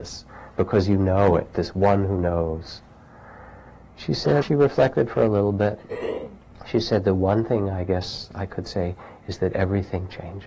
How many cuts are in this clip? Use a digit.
1